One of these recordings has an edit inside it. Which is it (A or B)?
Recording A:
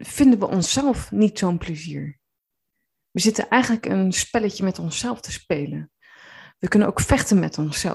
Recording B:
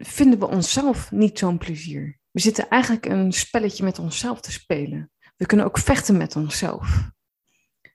B